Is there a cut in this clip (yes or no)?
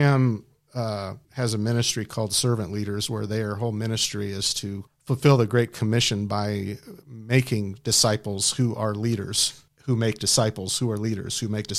yes